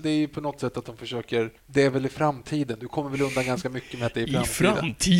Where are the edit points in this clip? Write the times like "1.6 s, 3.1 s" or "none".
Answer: 1.6 s